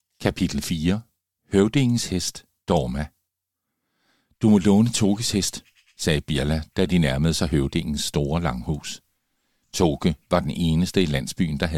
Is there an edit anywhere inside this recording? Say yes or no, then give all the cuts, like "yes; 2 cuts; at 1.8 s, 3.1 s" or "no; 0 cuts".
no; 0 cuts